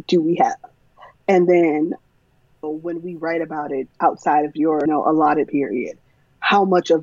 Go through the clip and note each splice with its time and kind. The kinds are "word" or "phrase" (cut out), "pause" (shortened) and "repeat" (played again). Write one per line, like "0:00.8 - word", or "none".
0:02.6 - word
0:04.9 - word
0:05.5 - word